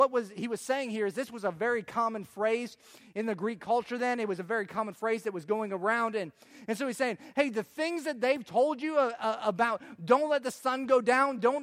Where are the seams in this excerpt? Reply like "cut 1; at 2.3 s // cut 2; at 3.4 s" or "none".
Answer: none